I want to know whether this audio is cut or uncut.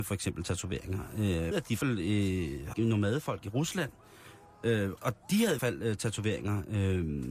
cut